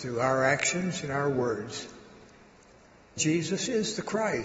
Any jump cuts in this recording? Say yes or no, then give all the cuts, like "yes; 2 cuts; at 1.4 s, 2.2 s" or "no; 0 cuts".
yes; 1 cut; at 3.2 s